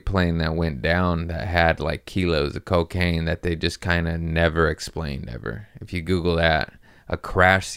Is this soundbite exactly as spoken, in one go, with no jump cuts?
yes; 0 cuts

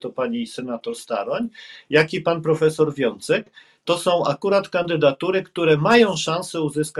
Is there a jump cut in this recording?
no; 0 cuts

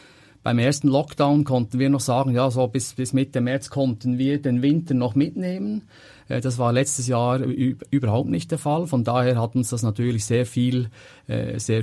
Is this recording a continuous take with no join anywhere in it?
yes; 0 cuts

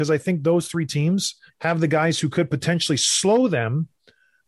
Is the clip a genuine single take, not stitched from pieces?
no; 1 cut; at 1.5 s

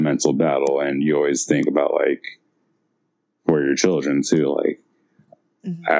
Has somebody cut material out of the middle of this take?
no; 0 cuts

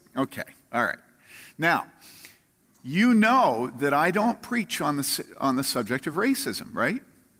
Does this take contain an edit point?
no; 0 cuts

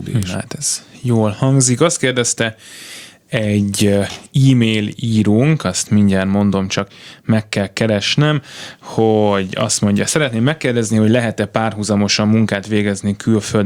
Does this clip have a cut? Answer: no; 0 cuts

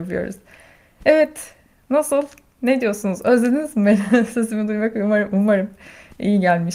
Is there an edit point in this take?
no; 0 cuts

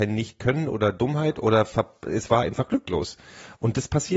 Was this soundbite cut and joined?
no; 0 cuts

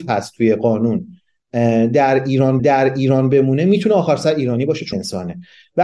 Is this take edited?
yes; 2 cuts; at 2.6 s, 4.9 s

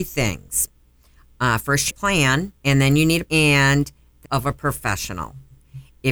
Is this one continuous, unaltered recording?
no; 4 cuts; at 1.9 s, 2.6 s, 3.3 s, 4.2 s

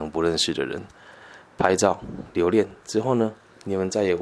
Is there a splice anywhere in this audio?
no; 0 cuts

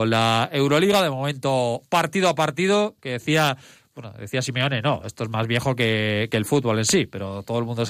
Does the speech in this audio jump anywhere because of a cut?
no; 0 cuts

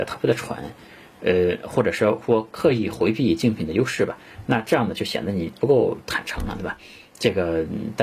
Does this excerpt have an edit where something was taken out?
no; 0 cuts

